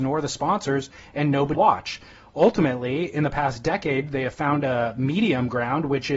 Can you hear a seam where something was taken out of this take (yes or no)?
yes